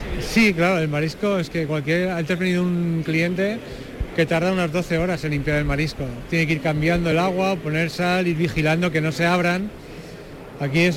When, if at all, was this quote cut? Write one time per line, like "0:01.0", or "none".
none